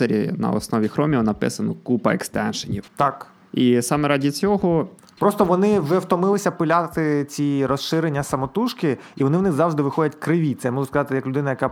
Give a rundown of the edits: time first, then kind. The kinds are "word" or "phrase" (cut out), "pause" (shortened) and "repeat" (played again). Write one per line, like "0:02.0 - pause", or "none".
0:02.9 - pause
0:05.0 - pause